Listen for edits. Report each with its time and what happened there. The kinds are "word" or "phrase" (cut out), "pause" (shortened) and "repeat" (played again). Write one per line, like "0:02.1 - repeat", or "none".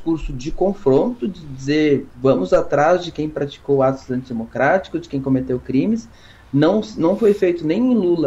none